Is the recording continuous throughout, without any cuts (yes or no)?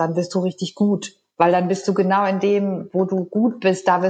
yes